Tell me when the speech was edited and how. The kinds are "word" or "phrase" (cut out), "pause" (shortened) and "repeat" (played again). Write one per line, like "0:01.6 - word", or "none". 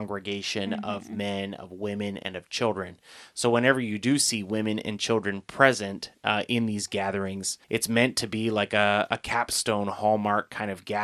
0:07.6 - pause

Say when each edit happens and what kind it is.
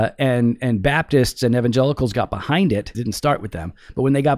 0:02.9 - word

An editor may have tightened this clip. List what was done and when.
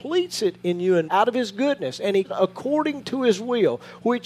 0:01.1 - word
0:02.2 - word

